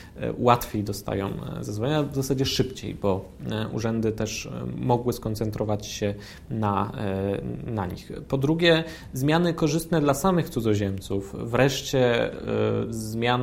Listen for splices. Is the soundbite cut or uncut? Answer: uncut